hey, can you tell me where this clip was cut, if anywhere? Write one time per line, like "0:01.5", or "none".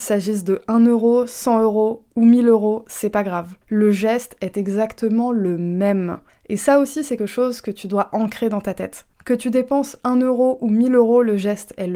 0:03.6
0:06.3
0:07.2
0:09.1